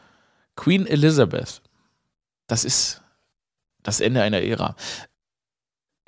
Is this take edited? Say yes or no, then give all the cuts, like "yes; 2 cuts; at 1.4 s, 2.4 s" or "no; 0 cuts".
no; 0 cuts